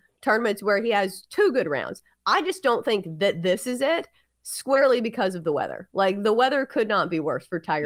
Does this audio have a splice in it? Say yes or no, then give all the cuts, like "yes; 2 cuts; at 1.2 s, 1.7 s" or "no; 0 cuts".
no; 0 cuts